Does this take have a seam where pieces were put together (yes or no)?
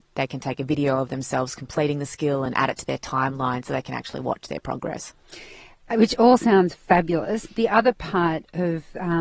no